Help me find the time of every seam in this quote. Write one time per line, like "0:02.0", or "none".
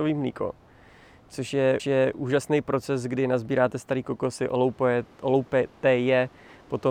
0:01.8